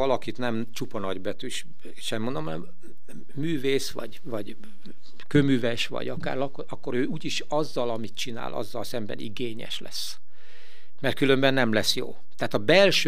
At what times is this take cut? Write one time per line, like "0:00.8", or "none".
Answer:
none